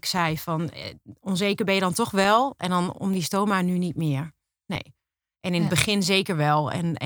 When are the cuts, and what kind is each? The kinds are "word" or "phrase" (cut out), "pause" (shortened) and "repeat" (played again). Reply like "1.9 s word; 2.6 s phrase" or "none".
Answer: none